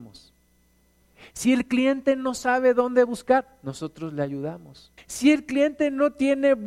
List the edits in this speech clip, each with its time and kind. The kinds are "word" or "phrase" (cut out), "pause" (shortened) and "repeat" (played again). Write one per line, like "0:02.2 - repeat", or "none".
0:05.0 - pause